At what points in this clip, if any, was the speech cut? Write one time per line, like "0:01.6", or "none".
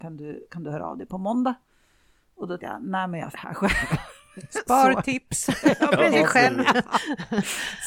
0:02.6
0:03.3
0:06.1